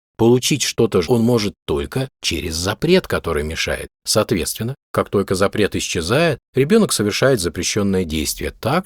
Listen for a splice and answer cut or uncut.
cut